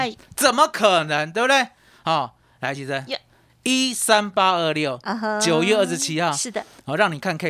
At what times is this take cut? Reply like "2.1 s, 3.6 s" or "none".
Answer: none